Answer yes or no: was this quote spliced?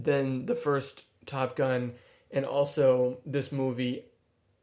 no